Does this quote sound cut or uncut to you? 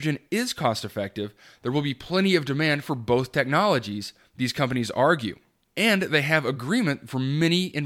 uncut